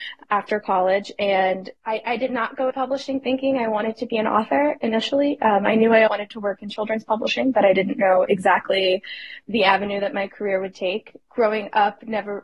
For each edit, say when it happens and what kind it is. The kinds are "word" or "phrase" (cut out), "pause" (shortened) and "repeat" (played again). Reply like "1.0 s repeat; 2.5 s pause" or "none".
1.8 s pause; 2.7 s word; 6.1 s word; 9.4 s word